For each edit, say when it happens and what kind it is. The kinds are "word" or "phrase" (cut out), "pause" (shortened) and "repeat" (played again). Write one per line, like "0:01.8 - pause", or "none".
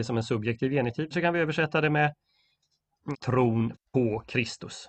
0:01.1 - word
0:03.1 - word